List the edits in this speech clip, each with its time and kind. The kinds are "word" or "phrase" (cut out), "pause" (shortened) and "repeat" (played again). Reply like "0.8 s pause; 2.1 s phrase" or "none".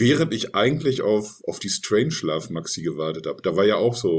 none

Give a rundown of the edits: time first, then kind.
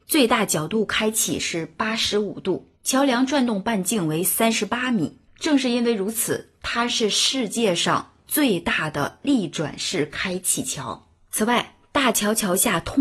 2.8 s pause; 5.3 s pause

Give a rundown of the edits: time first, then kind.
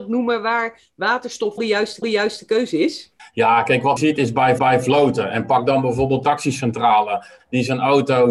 1.6 s phrase; 2.0 s repeat; 3.2 s pause; 4.0 s phrase; 4.6 s repeat; 6.2 s word

